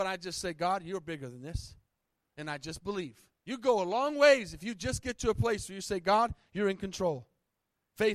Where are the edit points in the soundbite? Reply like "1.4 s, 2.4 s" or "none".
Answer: 3.4 s